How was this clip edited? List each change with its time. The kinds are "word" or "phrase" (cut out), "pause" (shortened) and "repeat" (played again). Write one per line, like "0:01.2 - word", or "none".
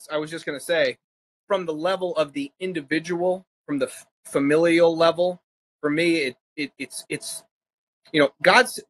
0:01.3 - pause
0:07.0 - word